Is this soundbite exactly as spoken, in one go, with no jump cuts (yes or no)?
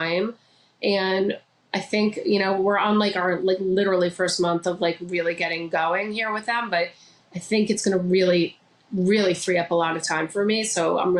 yes